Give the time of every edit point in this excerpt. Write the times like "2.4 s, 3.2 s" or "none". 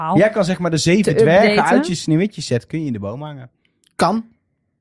none